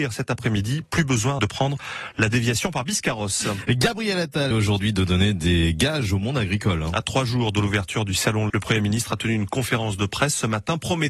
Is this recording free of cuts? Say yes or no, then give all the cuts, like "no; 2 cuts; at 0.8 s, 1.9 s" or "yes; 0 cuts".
no; 3 cuts; at 1.4 s, 4.5 s, 8.5 s